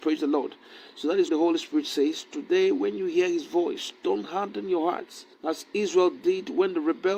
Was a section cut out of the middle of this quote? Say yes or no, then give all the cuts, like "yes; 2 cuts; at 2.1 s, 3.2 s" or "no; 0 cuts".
yes; 2 cuts; at 1.3 s, 5.3 s